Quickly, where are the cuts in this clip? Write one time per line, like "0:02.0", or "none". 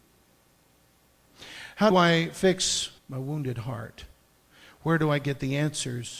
0:01.9
0:03.0